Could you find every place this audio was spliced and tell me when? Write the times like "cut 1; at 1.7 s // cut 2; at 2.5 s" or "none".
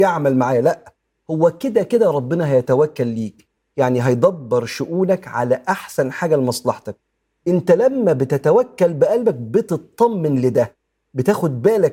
none

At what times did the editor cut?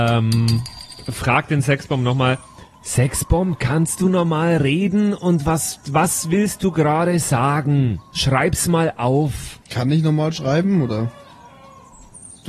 cut 1; at 9.6 s

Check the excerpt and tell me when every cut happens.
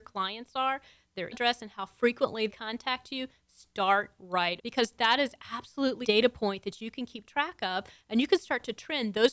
cut 1; at 1.3 s // cut 2; at 2.5 s // cut 3; at 4.6 s // cut 4; at 6.0 s

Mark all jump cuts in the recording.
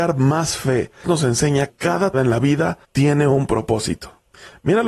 cut 1; at 1.0 s // cut 2; at 1.7 s // cut 3; at 2.1 s // cut 4; at 2.8 s

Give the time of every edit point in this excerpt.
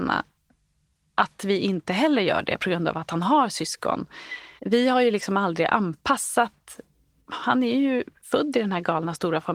cut 1; at 4.6 s

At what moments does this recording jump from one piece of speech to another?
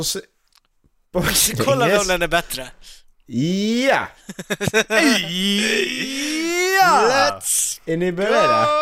cut 1; at 3.1 s

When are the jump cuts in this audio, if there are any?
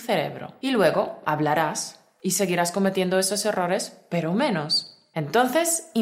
none

